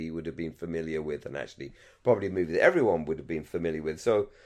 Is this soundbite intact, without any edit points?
yes; 0 cuts

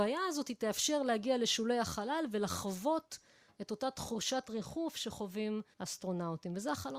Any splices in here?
no; 0 cuts

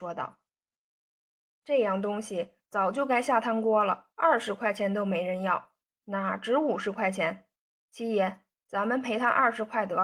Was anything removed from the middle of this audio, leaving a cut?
yes; 2 cuts; at 4.1 s, 7.6 s

